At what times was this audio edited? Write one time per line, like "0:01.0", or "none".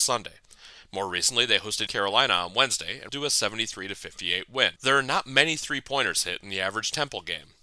0:01.9
0:03.1
0:04.8

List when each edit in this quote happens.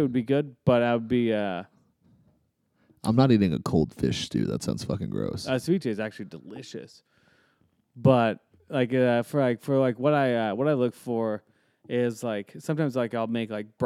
none

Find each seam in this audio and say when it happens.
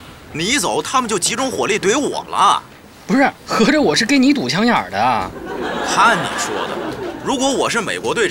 0:03.4

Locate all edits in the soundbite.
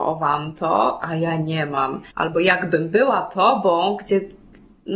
0:02.1

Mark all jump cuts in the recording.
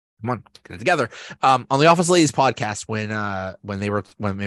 none

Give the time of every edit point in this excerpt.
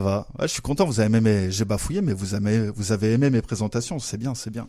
none

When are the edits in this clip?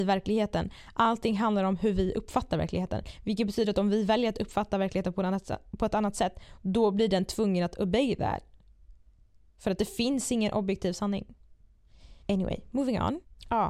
0:12.2

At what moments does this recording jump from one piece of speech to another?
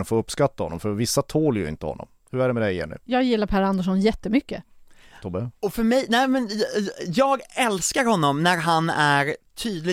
none

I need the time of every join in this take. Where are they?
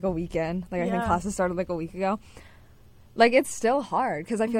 none

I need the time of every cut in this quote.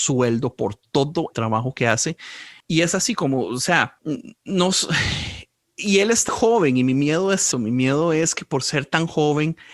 0:01.3
0:06.3
0:07.5

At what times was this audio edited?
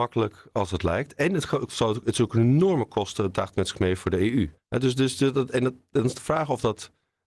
0:04.6

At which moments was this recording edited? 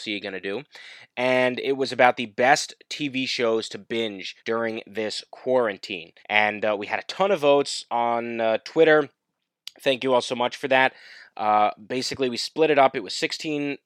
0:04.4
0:06.2

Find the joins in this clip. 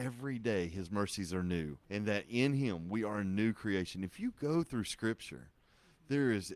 0:01.8

